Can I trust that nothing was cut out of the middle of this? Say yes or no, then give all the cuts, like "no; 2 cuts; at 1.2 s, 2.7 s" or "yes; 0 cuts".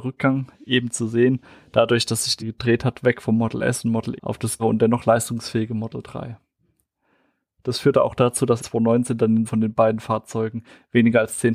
no; 5 cuts; at 2.4 s, 4.2 s, 4.6 s, 8.6 s, 9.5 s